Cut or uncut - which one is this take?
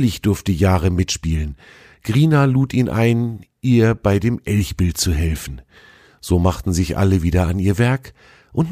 uncut